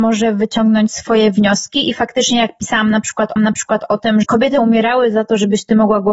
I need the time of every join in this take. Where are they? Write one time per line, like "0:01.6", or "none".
0:03.4
0:04.2